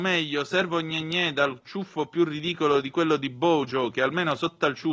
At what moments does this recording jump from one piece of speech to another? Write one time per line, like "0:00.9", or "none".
none